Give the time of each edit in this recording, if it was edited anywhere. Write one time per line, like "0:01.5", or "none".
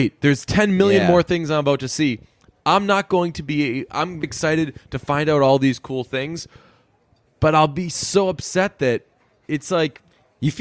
0:04.2